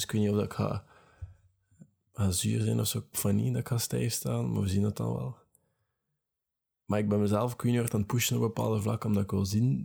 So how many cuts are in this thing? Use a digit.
1